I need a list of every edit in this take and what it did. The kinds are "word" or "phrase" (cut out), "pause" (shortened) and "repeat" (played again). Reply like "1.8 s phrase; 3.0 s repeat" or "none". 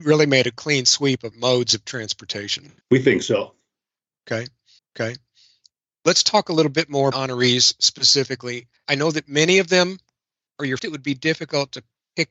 1.3 s phrase; 2.8 s pause; 4.8 s repeat; 7.1 s phrase; 8.8 s pause; 10.8 s phrase